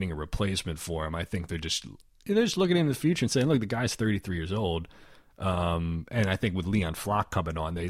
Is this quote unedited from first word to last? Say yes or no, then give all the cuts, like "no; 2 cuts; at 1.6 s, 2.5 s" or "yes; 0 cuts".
yes; 0 cuts